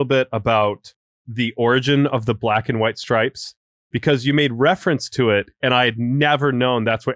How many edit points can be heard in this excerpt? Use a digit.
0